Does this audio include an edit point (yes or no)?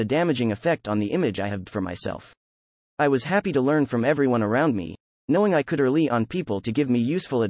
yes